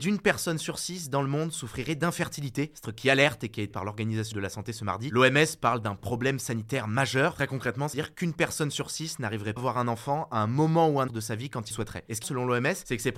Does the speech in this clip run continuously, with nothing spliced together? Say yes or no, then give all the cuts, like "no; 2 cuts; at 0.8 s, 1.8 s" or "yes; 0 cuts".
no; 8 cuts; at 2.8 s, 3.7 s, 4.3 s, 7.9 s, 9.6 s, 11.1 s, 11.7 s, 12.2 s